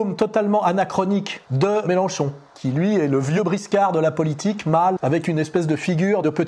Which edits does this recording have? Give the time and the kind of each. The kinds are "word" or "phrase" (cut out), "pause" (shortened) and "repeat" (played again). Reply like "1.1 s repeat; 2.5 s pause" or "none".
1.5 s pause; 5.0 s word